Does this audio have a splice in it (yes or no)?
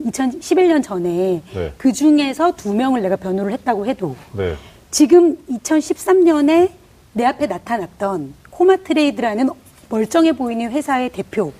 no